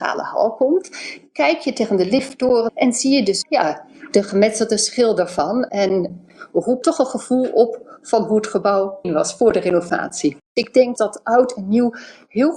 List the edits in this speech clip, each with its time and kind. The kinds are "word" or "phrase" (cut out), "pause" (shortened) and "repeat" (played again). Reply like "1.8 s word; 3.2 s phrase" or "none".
2.7 s word; 3.4 s word; 6.8 s word; 9.0 s word; 11.0 s word